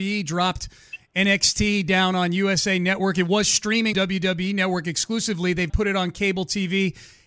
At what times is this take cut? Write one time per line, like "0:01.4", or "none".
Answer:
0:03.9
0:05.7